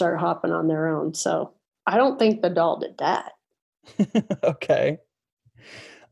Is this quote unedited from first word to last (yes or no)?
yes